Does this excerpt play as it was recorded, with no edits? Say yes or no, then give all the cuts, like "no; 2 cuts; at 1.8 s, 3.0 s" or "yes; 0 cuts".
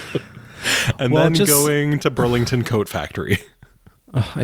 yes; 0 cuts